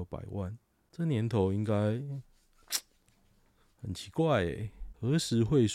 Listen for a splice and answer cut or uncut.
uncut